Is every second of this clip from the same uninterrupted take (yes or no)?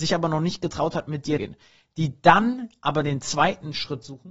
no